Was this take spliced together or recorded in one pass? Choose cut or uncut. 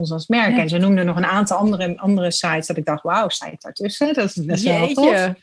uncut